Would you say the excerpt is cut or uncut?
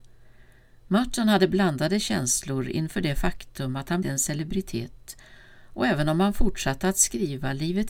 cut